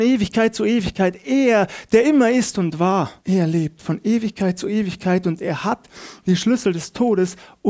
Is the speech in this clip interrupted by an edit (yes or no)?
yes